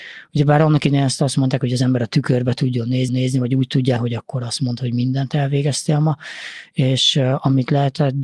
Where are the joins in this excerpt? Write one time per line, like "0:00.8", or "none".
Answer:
0:03.1
0:04.0

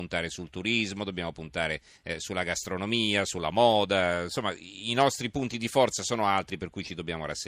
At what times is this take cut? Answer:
0:01.9

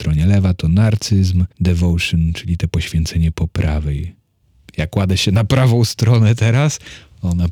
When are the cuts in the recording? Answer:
0:01.5
0:04.4

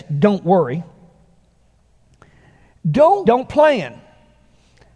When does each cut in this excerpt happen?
0:03.3

